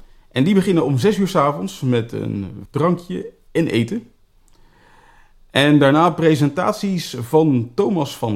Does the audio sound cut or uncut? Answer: cut